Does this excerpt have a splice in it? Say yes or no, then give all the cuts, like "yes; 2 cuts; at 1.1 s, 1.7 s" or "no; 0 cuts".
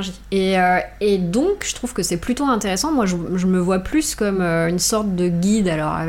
no; 0 cuts